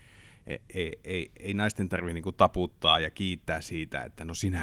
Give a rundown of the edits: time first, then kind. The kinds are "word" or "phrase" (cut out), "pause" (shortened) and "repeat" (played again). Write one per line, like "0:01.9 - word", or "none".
none